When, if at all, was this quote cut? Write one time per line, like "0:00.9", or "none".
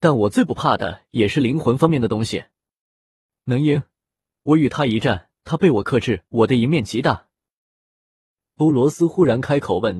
0:05.4
0:06.3